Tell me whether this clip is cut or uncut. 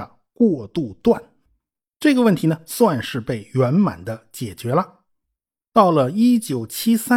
uncut